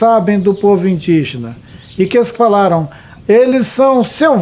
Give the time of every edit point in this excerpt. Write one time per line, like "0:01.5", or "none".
0:02.3
0:03.2